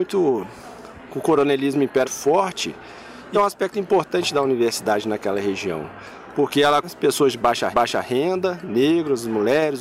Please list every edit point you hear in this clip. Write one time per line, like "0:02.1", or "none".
0:02.0
0:03.3
0:06.8
0:07.7